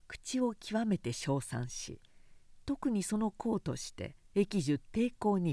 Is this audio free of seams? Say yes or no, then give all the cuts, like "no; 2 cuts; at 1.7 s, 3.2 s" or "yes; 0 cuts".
no; 1 cut; at 4.2 s